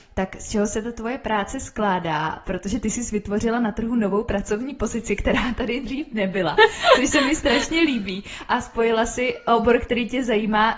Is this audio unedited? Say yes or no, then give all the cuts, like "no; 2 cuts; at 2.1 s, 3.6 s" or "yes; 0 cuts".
yes; 0 cuts